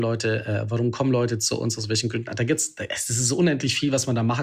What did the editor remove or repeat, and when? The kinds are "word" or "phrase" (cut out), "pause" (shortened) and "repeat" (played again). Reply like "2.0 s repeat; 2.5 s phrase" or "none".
none